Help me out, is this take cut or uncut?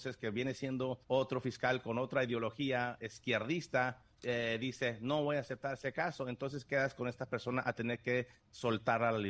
cut